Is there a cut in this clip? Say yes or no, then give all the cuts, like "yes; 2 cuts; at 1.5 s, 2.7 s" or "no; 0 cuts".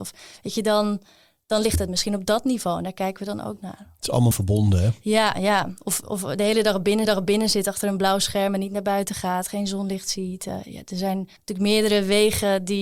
yes; 3 cuts; at 4.3 s, 7.0 s, 11.4 s